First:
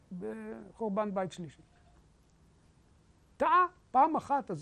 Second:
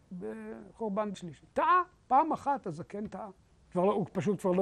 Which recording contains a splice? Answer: second; 2 cuts; at 1.1 s, 1.5 s

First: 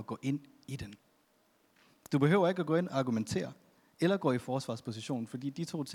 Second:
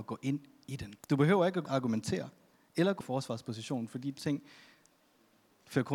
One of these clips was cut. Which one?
second; 4 cuts; at 1.0 s, 1.7 s, 3.0 s, 4.2 s

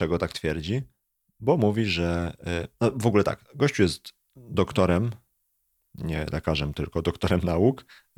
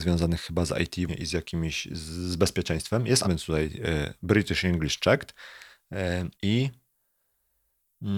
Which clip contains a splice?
second; 3 cuts; at 1.1 s, 3.2 s, 6.3 s

